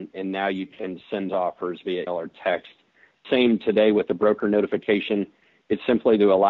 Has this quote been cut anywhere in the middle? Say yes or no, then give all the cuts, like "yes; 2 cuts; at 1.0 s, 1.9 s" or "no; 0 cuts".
yes; 3 cuts; at 1.3 s, 2.1 s, 3.2 s